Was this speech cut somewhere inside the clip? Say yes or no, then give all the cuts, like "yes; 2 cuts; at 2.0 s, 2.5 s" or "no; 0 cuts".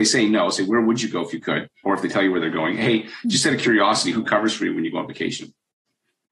yes; 1 cut; at 1.7 s